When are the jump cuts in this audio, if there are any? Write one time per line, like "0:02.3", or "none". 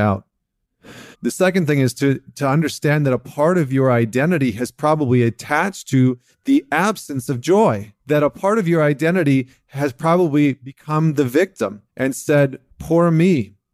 0:01.1
0:08.0
0:11.9